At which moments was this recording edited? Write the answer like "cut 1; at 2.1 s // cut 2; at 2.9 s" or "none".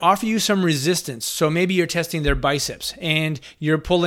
none